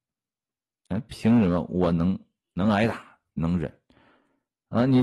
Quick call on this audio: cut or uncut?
uncut